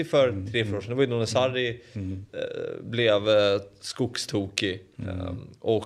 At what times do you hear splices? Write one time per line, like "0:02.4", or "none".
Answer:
0:02.3